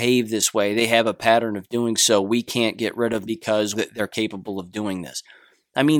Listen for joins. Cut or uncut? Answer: cut